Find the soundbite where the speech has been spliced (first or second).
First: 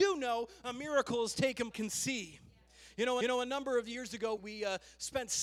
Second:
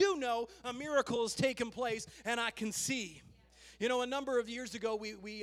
first